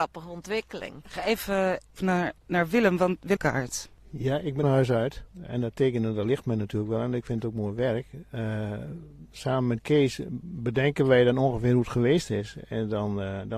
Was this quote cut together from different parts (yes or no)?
yes